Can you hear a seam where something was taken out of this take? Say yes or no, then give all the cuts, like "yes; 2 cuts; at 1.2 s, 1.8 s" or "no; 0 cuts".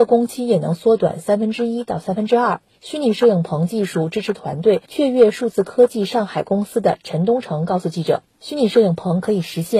yes; 1 cut; at 4.8 s